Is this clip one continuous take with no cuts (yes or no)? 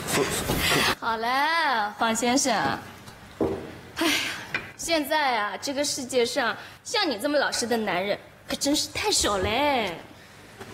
yes